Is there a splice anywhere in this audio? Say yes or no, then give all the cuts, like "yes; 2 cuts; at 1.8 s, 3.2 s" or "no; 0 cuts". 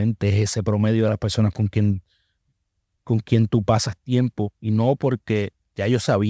no; 0 cuts